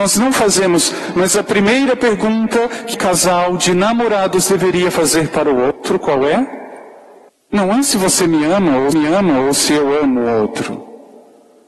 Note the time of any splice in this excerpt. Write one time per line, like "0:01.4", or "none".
0:02.9
0:07.3
0:08.9